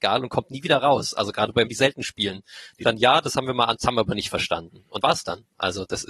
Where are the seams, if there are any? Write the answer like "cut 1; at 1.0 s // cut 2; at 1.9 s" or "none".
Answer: cut 1; at 1.7 s // cut 2; at 2.8 s // cut 3; at 3.8 s // cut 4; at 5.0 s